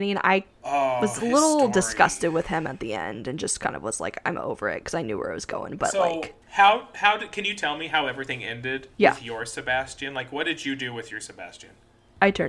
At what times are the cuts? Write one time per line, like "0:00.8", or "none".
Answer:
0:06.4
0:08.9

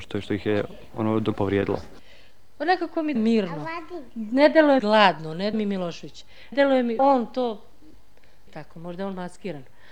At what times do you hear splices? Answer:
0:01.4
0:03.2
0:04.8
0:05.5
0:06.5
0:07.0
0:08.5

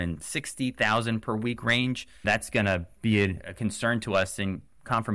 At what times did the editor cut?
none

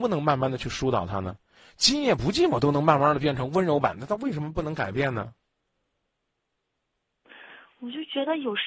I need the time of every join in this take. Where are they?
none

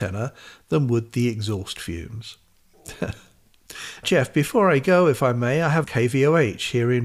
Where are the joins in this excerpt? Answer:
0:04.0
0:05.8

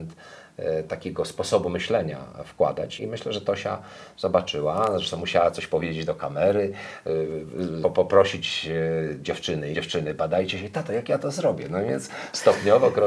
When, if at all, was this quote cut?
0:03.0
0:07.8
0:09.7

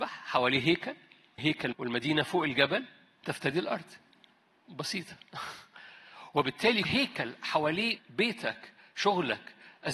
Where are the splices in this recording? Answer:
0:01.4
0:01.7
0:03.2
0:06.8
0:08.0

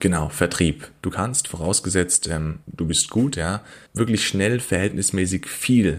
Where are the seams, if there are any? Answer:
0:02.6
0:03.9

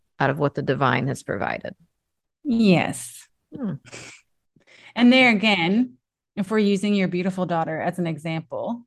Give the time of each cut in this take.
none

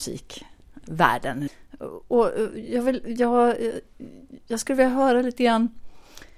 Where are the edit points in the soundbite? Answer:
none

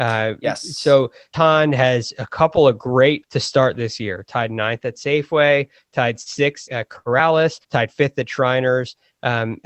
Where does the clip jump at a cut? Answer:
0:01.3
0:03.2
0:06.7
0:07.6

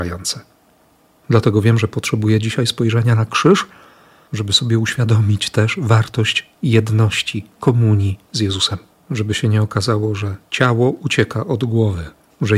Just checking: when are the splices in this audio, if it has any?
0:08.9

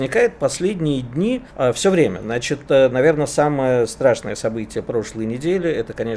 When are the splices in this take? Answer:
0:01.5

